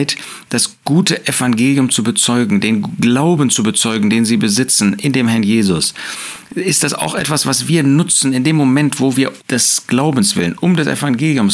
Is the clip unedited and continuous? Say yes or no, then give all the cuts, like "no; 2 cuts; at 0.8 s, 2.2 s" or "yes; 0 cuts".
no; 1 cut; at 9.4 s